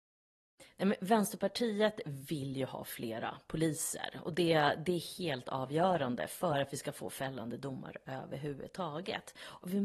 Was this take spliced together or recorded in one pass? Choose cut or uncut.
uncut